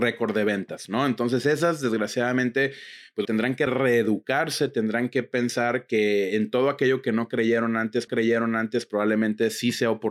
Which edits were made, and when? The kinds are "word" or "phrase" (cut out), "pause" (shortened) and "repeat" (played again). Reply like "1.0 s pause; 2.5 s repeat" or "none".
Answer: 3.2 s word; 3.7 s phrase; 8.1 s repeat

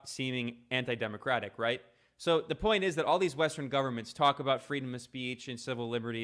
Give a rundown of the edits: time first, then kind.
none

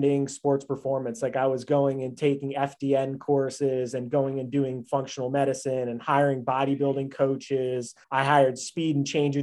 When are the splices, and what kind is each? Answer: 8.0 s pause

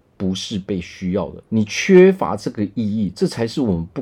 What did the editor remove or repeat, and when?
1.5 s pause

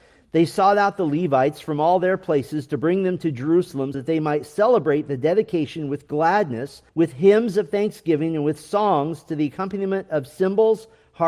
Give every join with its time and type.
3.9 s word; 6.9 s pause

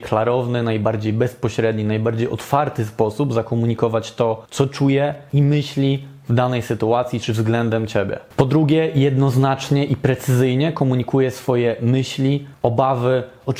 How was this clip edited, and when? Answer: 4.5 s pause

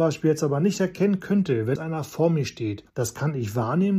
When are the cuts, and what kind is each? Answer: 1.8 s word; 2.9 s pause

